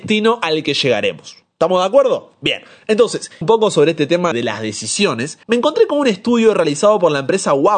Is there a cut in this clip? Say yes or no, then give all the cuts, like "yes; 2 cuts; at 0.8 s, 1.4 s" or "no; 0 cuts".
yes; 3 cuts; at 3.4 s, 4.3 s, 5.4 s